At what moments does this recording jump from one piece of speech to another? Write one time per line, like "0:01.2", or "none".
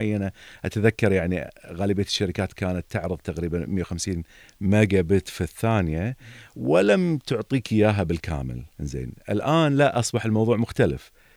0:08.7